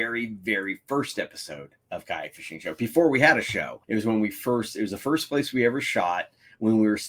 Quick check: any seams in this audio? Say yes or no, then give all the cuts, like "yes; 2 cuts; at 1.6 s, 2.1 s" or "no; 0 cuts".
yes; 2 cuts; at 1.8 s, 3.8 s